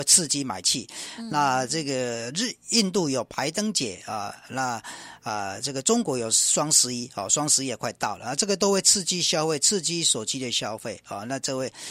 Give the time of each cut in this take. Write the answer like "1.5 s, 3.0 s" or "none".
none